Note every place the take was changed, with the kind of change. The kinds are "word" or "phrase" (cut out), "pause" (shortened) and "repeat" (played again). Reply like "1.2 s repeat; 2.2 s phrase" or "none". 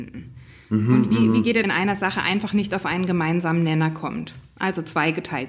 1.6 s phrase

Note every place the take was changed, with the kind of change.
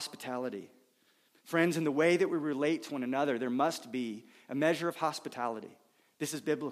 none

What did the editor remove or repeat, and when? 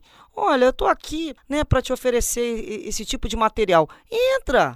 1.4 s pause

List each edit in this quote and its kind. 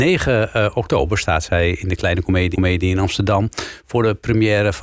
2.5 s repeat

